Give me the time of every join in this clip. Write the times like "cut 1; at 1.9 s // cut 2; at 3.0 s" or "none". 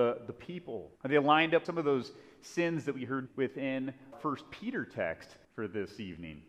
cut 1; at 1.0 s // cut 2; at 1.6 s // cut 3; at 3.3 s // cut 4; at 4.1 s // cut 5; at 5.4 s